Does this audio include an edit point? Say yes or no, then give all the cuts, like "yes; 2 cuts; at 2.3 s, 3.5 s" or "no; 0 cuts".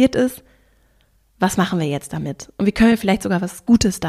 no; 0 cuts